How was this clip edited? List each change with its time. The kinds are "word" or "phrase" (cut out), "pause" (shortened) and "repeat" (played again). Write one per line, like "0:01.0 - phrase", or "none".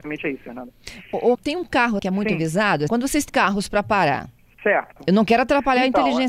0:01.3 - word
0:02.0 - word
0:02.9 - word
0:03.3 - phrase
0:04.4 - pause